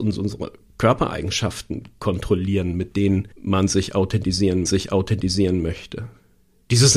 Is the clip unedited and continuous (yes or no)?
no